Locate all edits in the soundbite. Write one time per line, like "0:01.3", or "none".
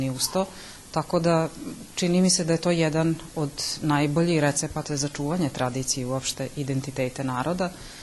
none